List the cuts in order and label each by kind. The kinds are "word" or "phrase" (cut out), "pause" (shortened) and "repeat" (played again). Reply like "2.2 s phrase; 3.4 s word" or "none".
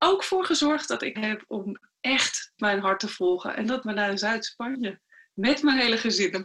1.2 s word; 2.6 s word; 3.8 s word